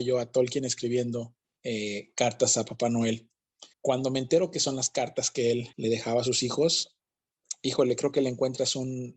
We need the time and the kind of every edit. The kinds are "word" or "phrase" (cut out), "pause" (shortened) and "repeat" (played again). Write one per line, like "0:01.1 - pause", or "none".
0:01.4 - pause
0:03.7 - pause
0:05.7 - pause